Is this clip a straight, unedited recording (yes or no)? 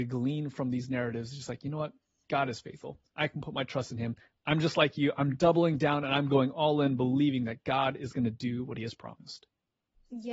yes